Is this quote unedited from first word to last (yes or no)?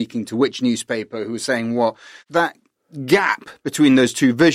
yes